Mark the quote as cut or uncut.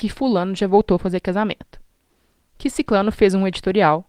uncut